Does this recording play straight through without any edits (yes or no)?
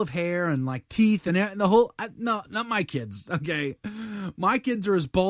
yes